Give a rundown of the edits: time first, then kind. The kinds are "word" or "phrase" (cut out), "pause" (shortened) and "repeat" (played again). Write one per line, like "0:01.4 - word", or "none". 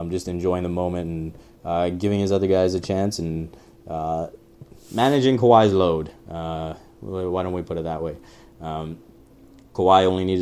none